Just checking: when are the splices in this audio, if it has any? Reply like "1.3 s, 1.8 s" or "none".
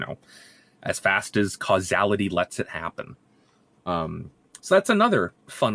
none